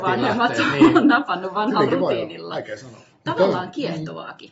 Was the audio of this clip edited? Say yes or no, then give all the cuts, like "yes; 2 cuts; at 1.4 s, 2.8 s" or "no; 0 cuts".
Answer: no; 0 cuts